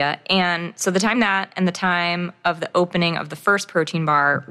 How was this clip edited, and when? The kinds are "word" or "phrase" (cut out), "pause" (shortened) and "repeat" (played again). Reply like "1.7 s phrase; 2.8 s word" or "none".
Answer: 1.1 s word